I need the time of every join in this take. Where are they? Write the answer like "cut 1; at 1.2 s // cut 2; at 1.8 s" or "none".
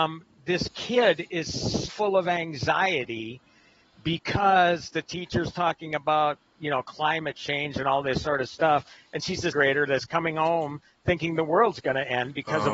cut 1; at 1.9 s // cut 2; at 9.5 s